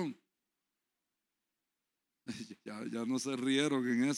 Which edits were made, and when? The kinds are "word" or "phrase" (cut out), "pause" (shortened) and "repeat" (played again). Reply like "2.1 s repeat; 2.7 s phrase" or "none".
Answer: 2.6 s pause